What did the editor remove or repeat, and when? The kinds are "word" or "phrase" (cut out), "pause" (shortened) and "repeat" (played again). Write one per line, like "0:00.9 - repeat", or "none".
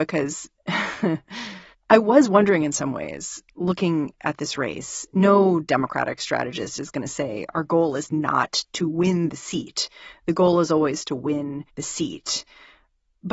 0:01.7 - pause
0:11.7 - pause